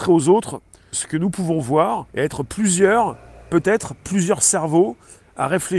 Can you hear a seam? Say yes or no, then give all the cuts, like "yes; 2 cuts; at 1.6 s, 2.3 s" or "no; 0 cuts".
yes; 2 cuts; at 0.9 s, 2.1 s